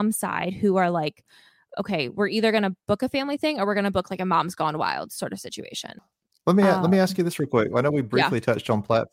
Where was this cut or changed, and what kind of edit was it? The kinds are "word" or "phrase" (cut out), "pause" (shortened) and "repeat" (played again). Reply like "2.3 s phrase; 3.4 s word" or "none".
none